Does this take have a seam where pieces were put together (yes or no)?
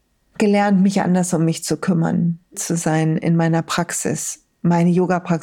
yes